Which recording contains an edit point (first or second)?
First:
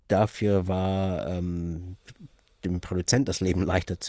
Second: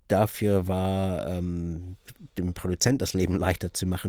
second